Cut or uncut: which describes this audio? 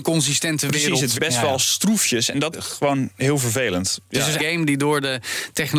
cut